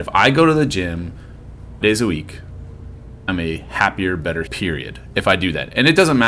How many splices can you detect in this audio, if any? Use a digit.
3